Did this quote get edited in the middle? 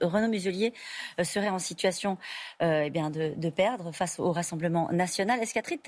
no; 0 cuts

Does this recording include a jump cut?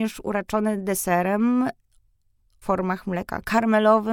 yes; 1 cut; at 2.6 s

